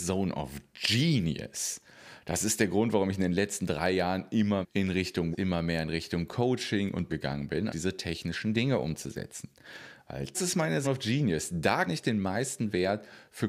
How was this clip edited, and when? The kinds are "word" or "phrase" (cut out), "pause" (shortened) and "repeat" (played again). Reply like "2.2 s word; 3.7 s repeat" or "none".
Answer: 4.6 s word; 5.3 s word; 7.1 s word; 7.7 s word; 10.3 s word; 10.8 s word; 11.9 s word